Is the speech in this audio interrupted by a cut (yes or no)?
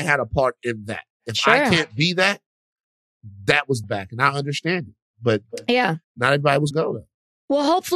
yes